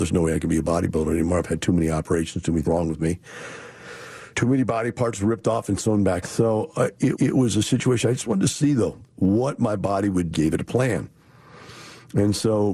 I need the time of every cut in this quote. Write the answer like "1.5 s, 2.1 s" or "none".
2.6 s, 4.3 s, 6.2 s, 7.1 s, 9.1 s, 10.3 s

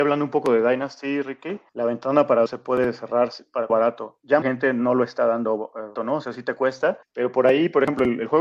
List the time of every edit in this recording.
1.7 s, 2.5 s, 3.7 s, 4.4 s, 6.0 s, 7.0 s

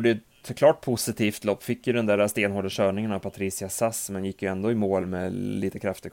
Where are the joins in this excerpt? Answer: none

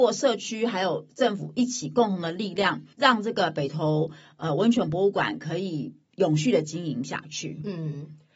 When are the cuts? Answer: 2.9 s

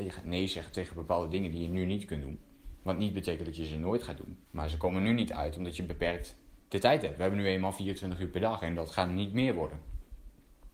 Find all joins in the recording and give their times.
4.5 s

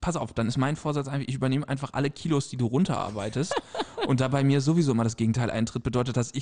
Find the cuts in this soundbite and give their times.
none

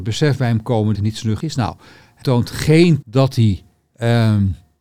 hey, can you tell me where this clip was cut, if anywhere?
0.9 s, 1.4 s, 2.2 s, 3.0 s

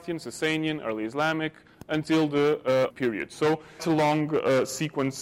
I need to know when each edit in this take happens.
2.9 s, 3.8 s

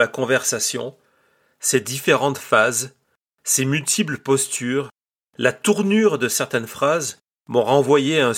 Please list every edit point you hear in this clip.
none

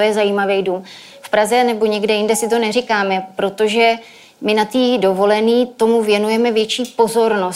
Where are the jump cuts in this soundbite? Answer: none

